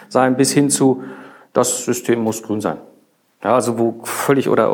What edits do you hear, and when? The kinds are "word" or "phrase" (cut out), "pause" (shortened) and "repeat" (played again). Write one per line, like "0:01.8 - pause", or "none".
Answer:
none

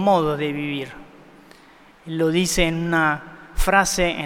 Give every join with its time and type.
none

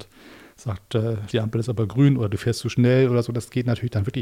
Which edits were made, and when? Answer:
0:01.3 - word

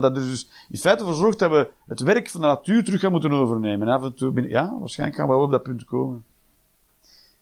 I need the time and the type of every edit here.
none

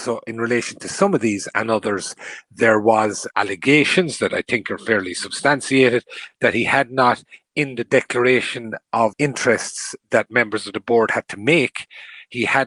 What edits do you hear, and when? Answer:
0:03.3 - word
0:09.1 - word

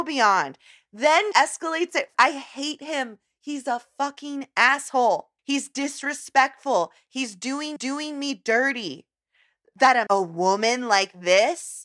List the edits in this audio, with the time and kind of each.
0:01.3 - word
0:02.1 - phrase
0:05.4 - pause
0:07.8 - repeat
0:10.1 - phrase

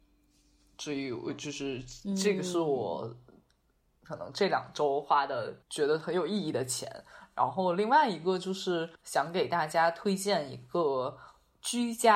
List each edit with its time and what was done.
0:05.6 - pause
0:08.9 - pause

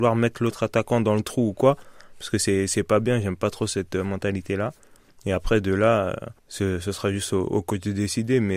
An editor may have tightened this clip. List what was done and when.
0:06.4 - pause

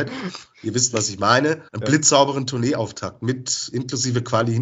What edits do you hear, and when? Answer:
0:01.7 - pause

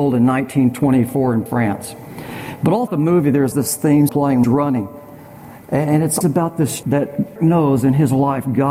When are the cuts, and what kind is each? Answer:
0:01.5 - word
0:02.9 - word
0:03.5 - word
0:04.1 - word
0:04.4 - word
0:06.2 - word
0:06.8 - word
0:07.4 - word

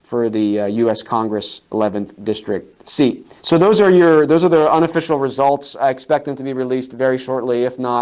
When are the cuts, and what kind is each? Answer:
0:03.4 - pause

